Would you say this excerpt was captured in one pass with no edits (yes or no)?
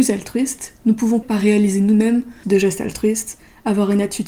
no